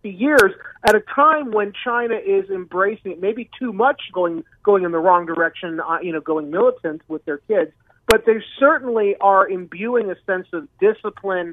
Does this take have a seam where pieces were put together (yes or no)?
yes